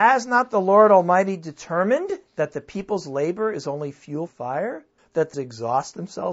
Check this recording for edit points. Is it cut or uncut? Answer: cut